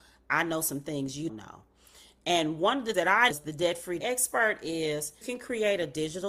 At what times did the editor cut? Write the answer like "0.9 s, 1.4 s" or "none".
1.3 s, 2.9 s, 3.3 s, 4.0 s, 5.2 s